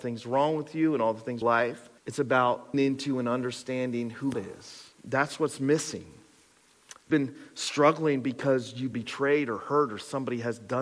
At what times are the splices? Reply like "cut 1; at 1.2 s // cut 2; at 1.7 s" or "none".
cut 1; at 1.4 s // cut 2; at 2.0 s // cut 3; at 2.7 s // cut 4; at 4.3 s // cut 5; at 4.9 s // cut 6; at 7.1 s // cut 7; at 8.9 s